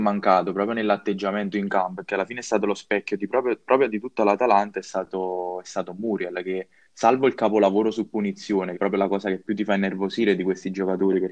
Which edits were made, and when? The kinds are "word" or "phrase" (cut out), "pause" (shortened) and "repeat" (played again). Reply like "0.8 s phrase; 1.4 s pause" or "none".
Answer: 8.7 s phrase